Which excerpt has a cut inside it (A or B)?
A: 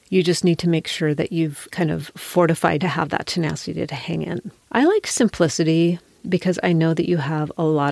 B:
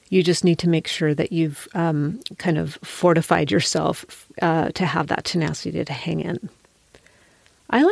A